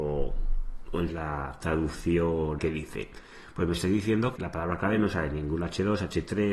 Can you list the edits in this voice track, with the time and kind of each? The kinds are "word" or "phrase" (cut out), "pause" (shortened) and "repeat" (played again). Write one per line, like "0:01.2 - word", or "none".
0:01.1 - phrase
0:02.6 - word
0:04.4 - word